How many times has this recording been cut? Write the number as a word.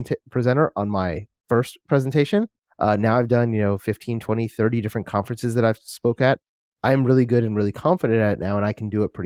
zero